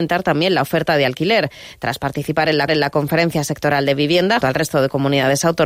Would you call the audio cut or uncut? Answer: cut